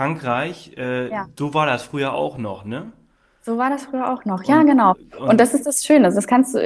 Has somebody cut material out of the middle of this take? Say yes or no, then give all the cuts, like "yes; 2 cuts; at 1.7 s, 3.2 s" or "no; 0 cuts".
no; 0 cuts